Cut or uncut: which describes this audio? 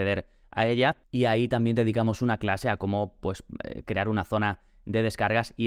uncut